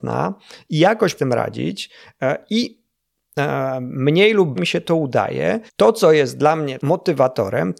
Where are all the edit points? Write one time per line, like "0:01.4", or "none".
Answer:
0:01.2
0:04.6
0:05.7
0:06.8